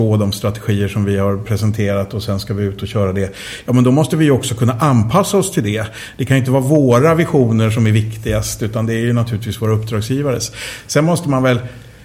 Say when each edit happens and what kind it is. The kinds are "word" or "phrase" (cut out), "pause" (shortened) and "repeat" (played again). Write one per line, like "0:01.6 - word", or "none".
none